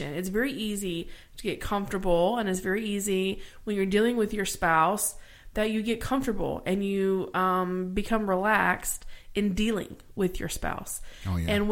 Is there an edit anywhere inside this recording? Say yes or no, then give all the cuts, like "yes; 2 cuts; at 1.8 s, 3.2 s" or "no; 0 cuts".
no; 0 cuts